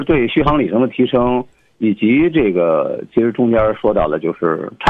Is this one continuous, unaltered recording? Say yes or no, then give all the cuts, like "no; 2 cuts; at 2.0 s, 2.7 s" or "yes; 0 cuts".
yes; 0 cuts